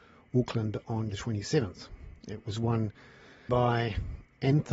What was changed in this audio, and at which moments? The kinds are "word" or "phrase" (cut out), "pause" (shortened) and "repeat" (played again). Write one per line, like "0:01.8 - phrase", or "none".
0:01.1 - word
0:03.5 - word